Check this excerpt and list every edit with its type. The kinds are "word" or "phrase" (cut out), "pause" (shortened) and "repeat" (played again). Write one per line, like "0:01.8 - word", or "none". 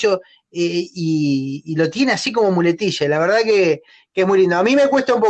none